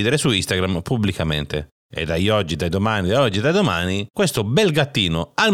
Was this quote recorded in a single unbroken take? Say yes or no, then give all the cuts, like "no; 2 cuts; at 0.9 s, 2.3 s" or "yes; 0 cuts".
yes; 0 cuts